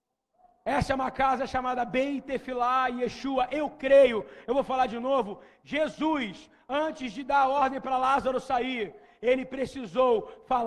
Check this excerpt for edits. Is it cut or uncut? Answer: uncut